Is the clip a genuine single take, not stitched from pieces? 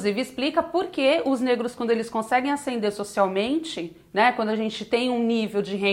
yes; 0 cuts

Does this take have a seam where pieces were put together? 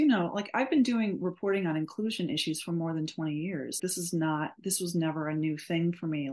yes; 1 cut; at 3.8 s

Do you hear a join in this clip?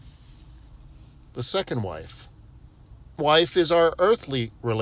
yes; 1 cut; at 3.2 s

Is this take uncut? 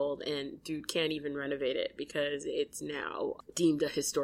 yes; 0 cuts

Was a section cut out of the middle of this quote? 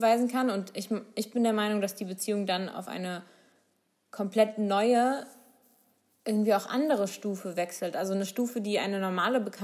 no; 0 cuts

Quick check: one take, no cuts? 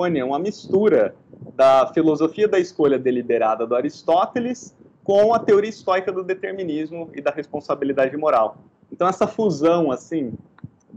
yes; 0 cuts

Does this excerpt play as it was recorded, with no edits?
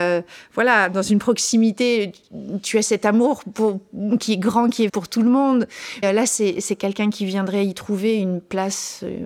no; 2 cuts; at 4.9 s, 6.0 s

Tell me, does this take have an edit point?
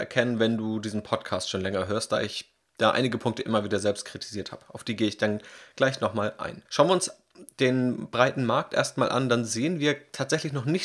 yes; 1 cut; at 6.7 s

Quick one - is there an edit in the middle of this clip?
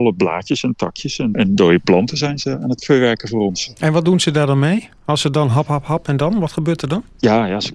yes; 2 cuts; at 1.3 s, 5.7 s

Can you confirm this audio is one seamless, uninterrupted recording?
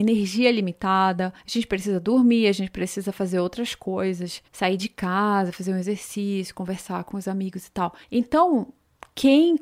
no; 3 cuts; at 1.4 s, 4.5 s, 8.0 s

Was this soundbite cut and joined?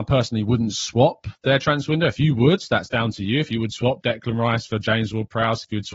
no; 0 cuts

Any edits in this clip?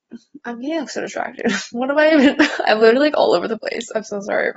no; 0 cuts

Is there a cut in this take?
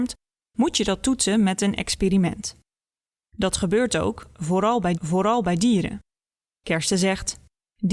yes; 1 cut; at 4.9 s

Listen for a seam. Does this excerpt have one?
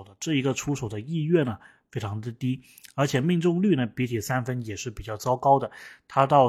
no; 0 cuts

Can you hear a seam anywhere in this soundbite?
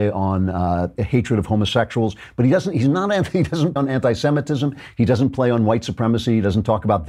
yes; 2 cuts; at 1.0 s, 3.8 s

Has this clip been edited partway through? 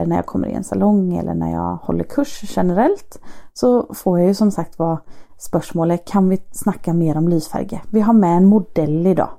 no; 0 cuts

